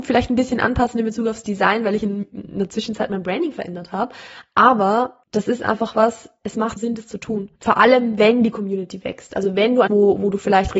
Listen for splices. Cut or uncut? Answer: cut